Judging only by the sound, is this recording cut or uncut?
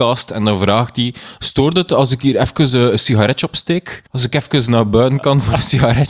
cut